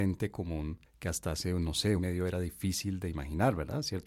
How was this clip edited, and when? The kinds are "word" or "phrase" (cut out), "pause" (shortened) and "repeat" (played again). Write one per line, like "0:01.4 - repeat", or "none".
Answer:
0:02.0 - phrase